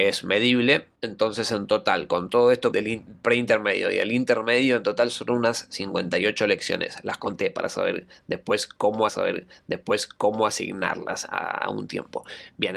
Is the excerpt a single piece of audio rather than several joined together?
no; 3 cuts; at 1.0 s, 2.7 s, 9.1 s

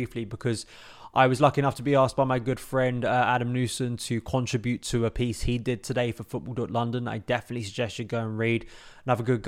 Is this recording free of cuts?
yes; 0 cuts

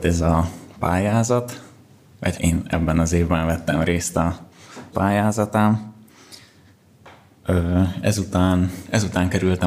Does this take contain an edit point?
yes; 2 cuts; at 2.3 s, 4.9 s

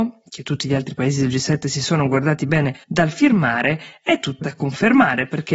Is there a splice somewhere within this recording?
yes; 2 cuts; at 2.8 s, 4.4 s

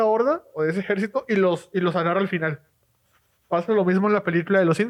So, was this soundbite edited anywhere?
no; 0 cuts

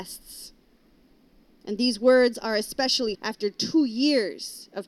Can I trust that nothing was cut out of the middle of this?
no; 1 cut; at 3.1 s

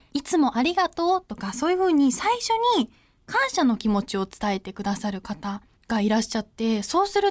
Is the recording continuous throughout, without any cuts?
no; 1 cut; at 5.7 s

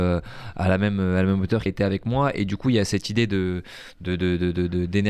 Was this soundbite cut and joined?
yes; 1 cut; at 1.7 s

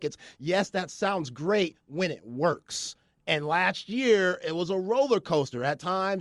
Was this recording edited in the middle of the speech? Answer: no; 0 cuts

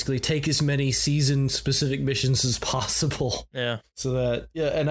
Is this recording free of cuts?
no; 1 cut; at 3.9 s

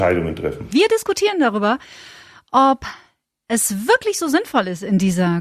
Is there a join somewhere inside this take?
no; 0 cuts

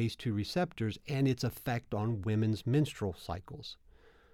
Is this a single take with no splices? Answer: yes; 0 cuts

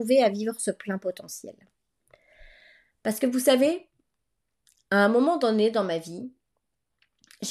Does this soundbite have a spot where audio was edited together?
no; 0 cuts

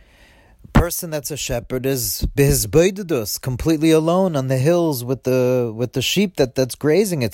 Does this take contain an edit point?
no; 0 cuts

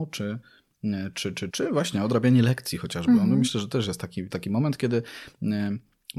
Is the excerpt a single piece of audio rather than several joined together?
no; 2 cuts; at 1.5 s, 4.3 s

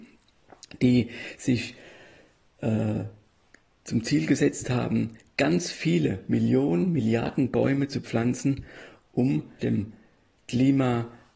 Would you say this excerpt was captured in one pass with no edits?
no; 1 cut; at 9.6 s

